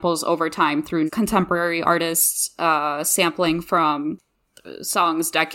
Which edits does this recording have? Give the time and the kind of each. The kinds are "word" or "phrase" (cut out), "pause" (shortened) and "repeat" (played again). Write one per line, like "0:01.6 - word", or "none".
0:01.1 - phrase